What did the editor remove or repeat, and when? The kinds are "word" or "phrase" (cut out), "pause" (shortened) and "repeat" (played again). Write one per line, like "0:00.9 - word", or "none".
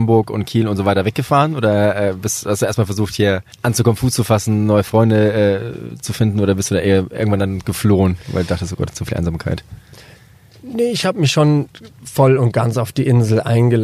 0:03.5 - pause